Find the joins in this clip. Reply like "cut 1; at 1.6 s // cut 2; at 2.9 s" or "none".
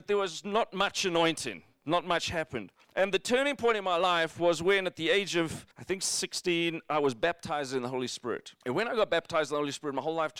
cut 1; at 2.8 s // cut 2; at 5.7 s // cut 3; at 8.6 s